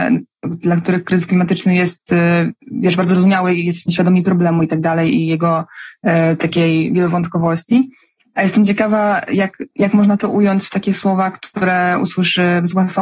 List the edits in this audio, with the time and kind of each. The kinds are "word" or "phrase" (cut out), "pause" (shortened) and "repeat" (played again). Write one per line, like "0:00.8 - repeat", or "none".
0:02.6 - pause
0:09.7 - pause